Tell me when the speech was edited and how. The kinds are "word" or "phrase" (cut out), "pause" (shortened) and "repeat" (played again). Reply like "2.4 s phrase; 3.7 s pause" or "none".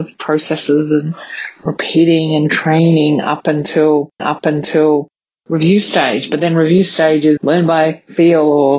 4.2 s repeat; 7.4 s word